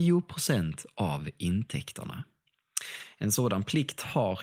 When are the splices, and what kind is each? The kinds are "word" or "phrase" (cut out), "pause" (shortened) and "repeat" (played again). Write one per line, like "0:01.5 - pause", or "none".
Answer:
none